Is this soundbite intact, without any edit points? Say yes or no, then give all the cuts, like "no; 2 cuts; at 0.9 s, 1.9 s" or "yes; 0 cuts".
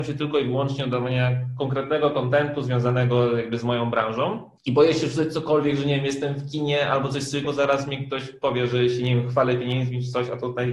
no; 2 cuts; at 4.6 s, 7.4 s